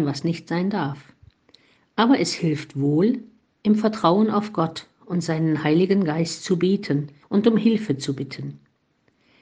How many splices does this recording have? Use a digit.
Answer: 1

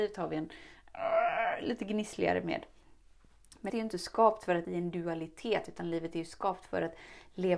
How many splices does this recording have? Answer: 2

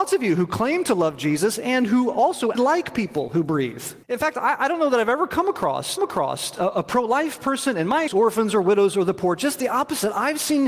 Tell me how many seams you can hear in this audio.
4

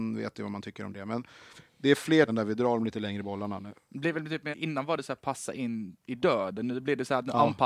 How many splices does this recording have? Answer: 2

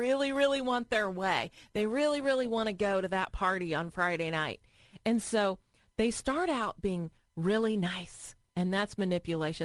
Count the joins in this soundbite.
0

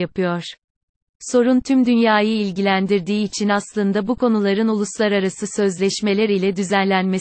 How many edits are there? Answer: 0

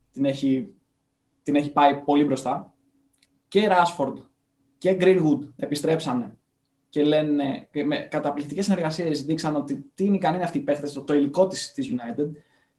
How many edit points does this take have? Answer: 0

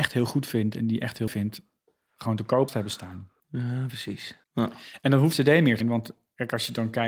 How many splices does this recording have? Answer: 6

